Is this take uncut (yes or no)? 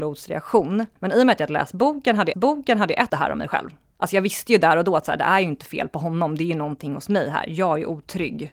no